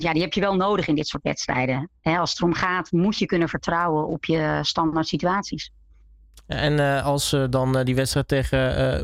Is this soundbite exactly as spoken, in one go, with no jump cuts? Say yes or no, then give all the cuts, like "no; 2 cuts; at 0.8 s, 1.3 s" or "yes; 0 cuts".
yes; 0 cuts